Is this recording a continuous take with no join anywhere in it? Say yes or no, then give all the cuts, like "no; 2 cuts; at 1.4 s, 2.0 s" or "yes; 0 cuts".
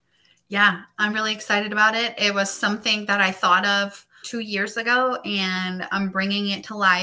no; 2 cuts; at 1.1 s, 4.2 s